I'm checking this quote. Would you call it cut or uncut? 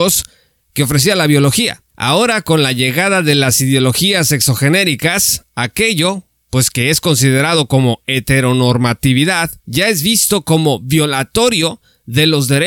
cut